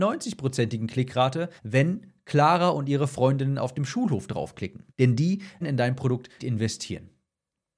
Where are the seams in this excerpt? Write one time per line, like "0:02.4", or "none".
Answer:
0:01.6
0:04.9
0:05.6
0:06.4

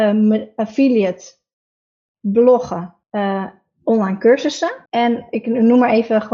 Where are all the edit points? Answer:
0:03.0
0:04.9

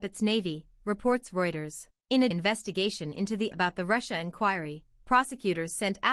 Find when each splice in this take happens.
0:02.0
0:02.3
0:03.5

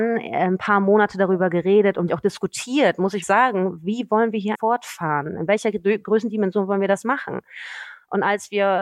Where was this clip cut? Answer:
0:02.1
0:03.2
0:04.5

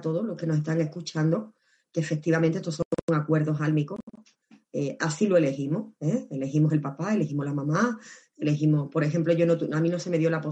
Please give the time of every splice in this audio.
none

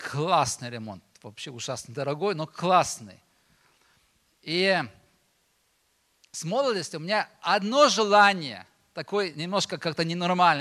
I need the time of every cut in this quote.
none

